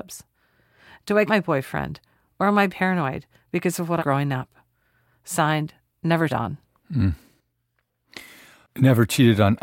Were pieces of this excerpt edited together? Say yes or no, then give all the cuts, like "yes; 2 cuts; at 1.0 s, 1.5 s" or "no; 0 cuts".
yes; 4 cuts; at 1.3 s, 2.7 s, 4.0 s, 6.3 s